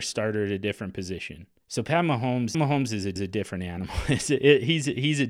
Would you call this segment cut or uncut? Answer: cut